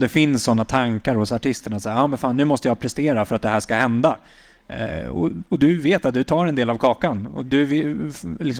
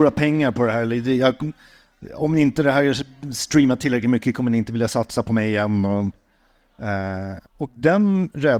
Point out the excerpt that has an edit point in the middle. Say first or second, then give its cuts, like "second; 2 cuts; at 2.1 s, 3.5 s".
second; 1 cut; at 7.5 s